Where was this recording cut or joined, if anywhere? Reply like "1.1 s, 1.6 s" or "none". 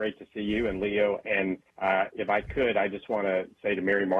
1.7 s